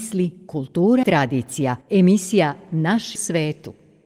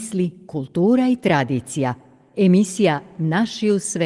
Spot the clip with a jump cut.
first; 3 cuts; at 1.0 s, 1.8 s, 3.2 s

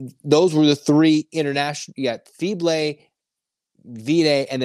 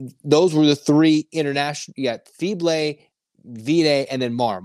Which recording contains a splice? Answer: second; 1 cut; at 3.1 s

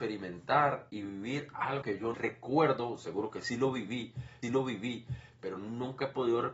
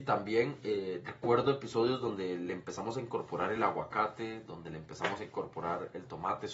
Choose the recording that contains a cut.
first; 3 cuts; at 1.8 s, 2.1 s, 4.4 s

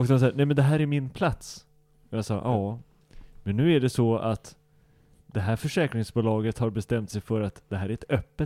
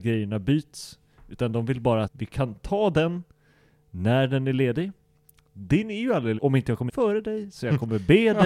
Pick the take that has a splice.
second; 3 cuts; at 2.0 s, 6.4 s, 6.9 s

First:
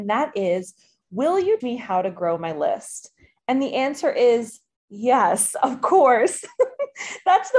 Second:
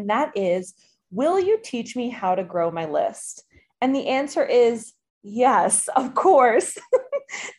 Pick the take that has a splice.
first; 1 cut; at 1.6 s

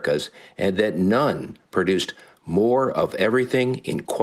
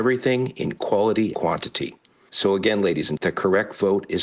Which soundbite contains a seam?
second; 2 cuts; at 1.3 s, 3.2 s

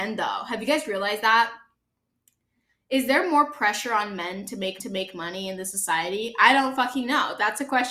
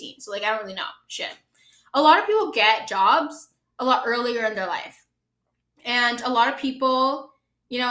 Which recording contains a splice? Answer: first; 1 cut; at 4.8 s

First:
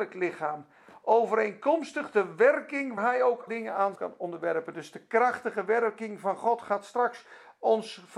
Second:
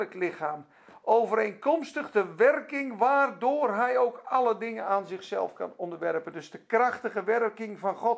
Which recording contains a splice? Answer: first; 3 cuts; at 3.0 s, 3.5 s, 3.9 s

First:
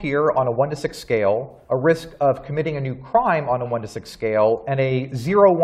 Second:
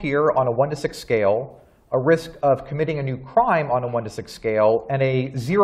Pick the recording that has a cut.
first; 1 cut; at 1.7 s

